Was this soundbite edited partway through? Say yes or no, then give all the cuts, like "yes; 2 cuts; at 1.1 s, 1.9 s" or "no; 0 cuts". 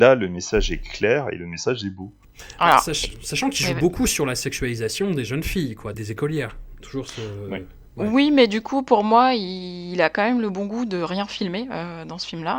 yes; 1 cut; at 5.9 s